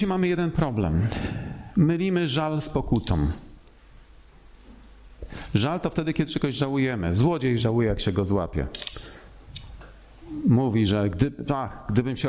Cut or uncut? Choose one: uncut